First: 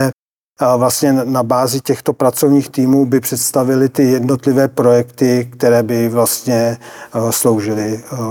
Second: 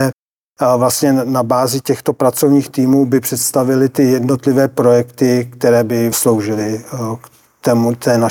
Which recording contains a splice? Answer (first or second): second